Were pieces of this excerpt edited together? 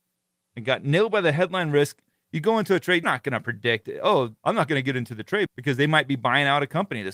yes; 2 cuts; at 3.0 s, 4.4 s

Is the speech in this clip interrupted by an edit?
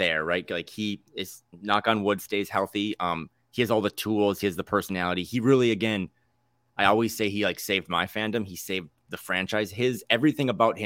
no; 0 cuts

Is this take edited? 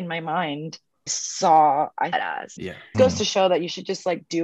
yes; 4 cuts; at 1.1 s, 2.1 s, 2.6 s, 2.9 s

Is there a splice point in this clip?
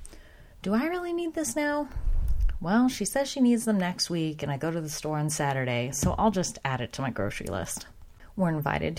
no; 0 cuts

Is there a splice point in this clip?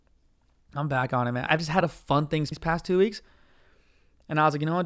yes; 3 cuts; at 1.5 s, 1.8 s, 2.5 s

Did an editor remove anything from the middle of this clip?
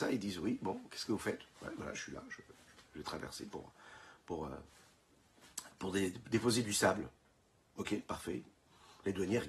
no; 0 cuts

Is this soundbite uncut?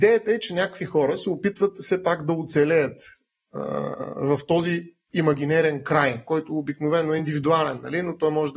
yes; 0 cuts

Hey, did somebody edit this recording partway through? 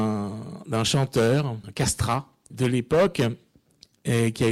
yes; 2 cuts; at 1.6 s, 2.5 s

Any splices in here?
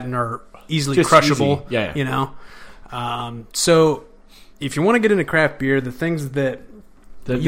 no; 0 cuts

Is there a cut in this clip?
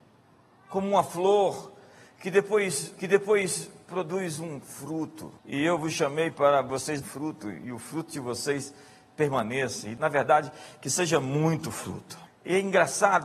yes; 4 cuts; at 3.0 s, 5.4 s, 7.0 s, 12.3 s

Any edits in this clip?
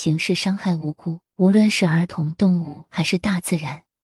yes; 1 cut; at 1.3 s

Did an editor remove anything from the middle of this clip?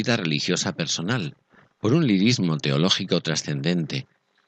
no; 0 cuts

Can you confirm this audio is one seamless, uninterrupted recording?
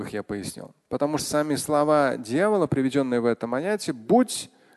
no; 1 cut; at 1.2 s

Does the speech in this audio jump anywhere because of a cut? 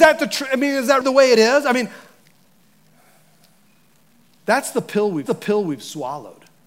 yes; 2 cuts; at 1.0 s, 5.3 s

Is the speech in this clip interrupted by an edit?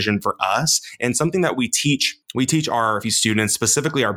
yes; 2 cuts; at 2.2 s, 3.0 s

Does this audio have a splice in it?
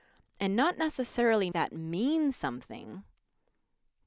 yes; 1 cut; at 1.5 s

